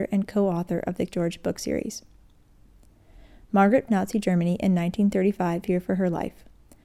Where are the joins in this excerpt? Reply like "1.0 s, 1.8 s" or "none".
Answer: 1.1 s, 3.9 s, 5.6 s